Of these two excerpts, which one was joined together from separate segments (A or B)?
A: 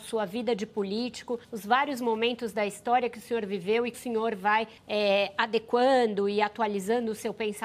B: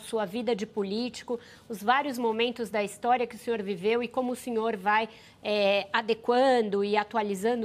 A